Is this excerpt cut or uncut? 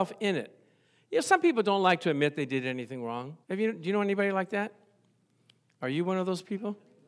cut